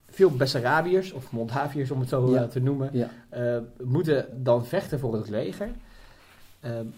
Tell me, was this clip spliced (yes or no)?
yes